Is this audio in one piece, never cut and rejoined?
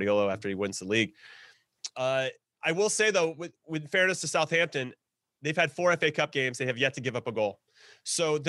yes; 0 cuts

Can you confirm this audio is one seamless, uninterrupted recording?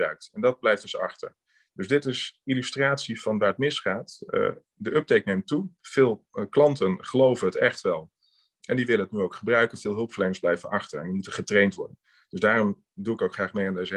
yes; 0 cuts

